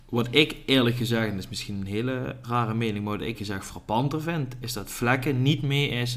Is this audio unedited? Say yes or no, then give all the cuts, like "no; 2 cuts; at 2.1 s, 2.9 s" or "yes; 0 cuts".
no; 2 cuts; at 2.4 s, 3.3 s